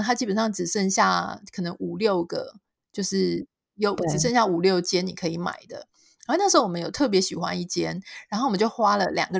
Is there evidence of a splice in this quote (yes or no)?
no